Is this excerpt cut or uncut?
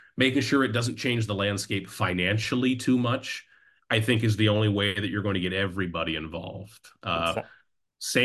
uncut